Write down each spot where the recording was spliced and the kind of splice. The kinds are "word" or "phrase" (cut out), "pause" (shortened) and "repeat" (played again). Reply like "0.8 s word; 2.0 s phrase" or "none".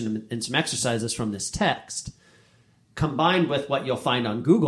none

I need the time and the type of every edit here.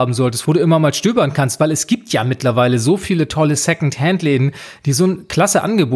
none

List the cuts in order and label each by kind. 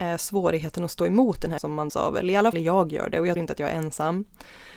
1.6 s word; 1.9 s word; 2.5 s word; 3.4 s word

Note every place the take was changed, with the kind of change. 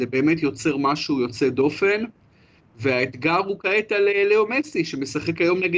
none

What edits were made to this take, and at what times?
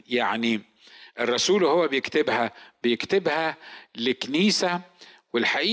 none

